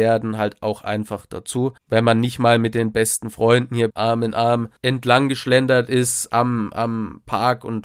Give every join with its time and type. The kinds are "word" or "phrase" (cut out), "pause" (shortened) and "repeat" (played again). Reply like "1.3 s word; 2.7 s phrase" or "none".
1.8 s pause; 3.9 s word; 4.8 s pause